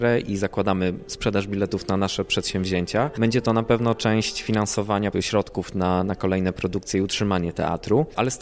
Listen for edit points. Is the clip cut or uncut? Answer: cut